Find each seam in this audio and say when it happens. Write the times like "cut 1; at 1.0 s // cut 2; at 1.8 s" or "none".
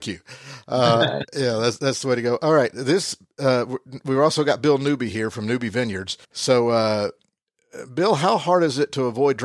cut 1; at 6.2 s